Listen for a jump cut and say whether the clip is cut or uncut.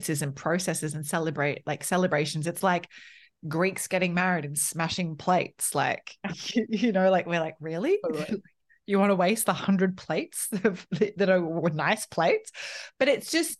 uncut